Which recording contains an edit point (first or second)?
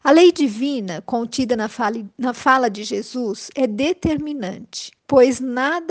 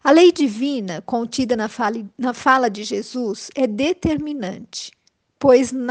first